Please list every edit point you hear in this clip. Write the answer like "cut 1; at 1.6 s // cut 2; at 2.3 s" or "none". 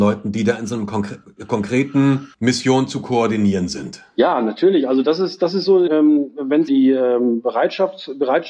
cut 1; at 2.3 s // cut 2; at 5.9 s // cut 3; at 6.7 s